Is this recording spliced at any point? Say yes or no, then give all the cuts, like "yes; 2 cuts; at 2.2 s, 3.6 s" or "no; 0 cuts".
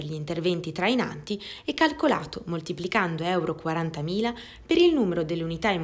no; 0 cuts